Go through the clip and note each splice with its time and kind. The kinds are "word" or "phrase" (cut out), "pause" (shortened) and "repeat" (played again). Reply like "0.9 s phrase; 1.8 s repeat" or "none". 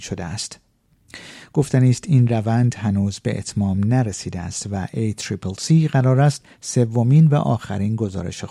none